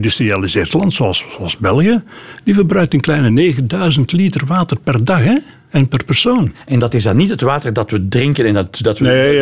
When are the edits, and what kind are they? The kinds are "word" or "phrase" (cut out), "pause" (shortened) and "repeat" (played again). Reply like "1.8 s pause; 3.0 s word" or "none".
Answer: none